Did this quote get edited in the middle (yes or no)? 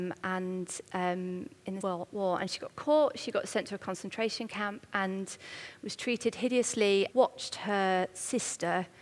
yes